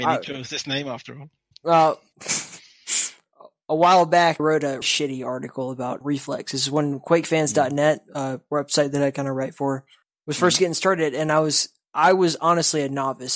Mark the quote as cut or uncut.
cut